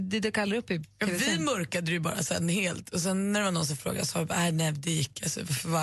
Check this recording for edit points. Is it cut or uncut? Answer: uncut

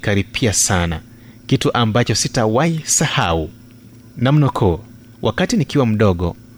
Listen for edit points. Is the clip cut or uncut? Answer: cut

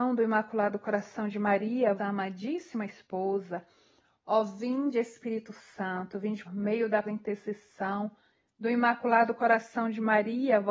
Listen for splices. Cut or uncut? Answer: cut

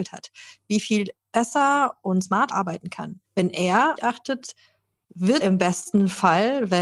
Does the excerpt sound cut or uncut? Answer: cut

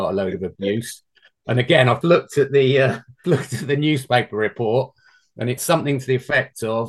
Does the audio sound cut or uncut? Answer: cut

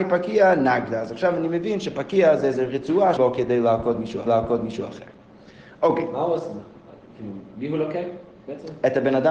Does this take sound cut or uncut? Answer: cut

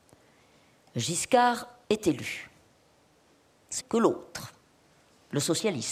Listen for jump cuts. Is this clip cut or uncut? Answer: cut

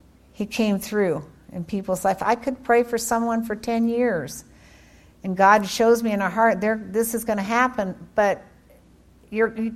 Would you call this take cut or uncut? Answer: uncut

